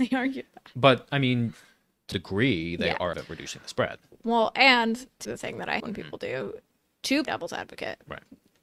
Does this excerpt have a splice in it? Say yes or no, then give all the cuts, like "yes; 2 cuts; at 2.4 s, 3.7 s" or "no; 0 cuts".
yes; 5 cuts; at 2.1 s, 3.1 s, 5.2 s, 5.8 s, 7.2 s